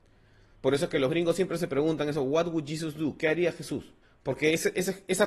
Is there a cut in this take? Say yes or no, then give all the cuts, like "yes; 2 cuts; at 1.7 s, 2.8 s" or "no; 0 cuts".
yes; 1 cut; at 4.0 s